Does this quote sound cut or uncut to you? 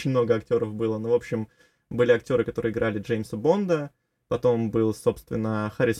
uncut